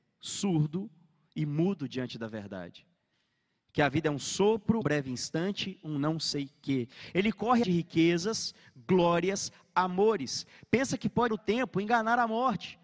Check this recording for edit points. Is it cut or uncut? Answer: cut